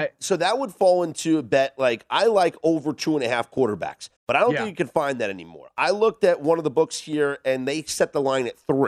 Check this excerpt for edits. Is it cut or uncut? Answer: cut